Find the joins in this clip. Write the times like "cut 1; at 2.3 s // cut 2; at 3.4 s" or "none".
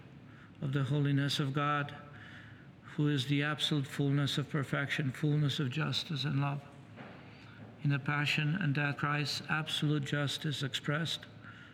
cut 1; at 8.9 s // cut 2; at 10.6 s